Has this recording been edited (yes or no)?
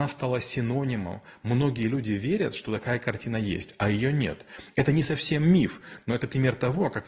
no